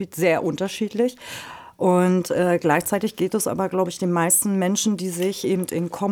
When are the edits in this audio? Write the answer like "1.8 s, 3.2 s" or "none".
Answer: none